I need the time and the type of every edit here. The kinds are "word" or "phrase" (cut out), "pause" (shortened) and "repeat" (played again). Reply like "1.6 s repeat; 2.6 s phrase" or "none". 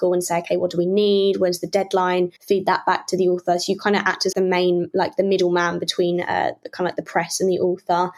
2.4 s pause; 4.3 s word